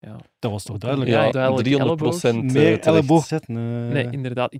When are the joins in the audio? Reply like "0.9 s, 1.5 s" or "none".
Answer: 1.3 s, 3.3 s